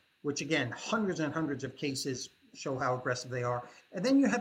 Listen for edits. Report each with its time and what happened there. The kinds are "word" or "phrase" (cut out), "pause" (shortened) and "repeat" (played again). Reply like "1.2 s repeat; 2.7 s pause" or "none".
none